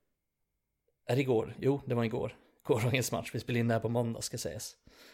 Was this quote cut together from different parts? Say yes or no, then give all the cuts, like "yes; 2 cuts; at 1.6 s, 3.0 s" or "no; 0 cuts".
no; 0 cuts